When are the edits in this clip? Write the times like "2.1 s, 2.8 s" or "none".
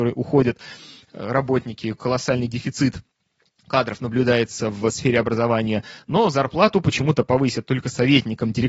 none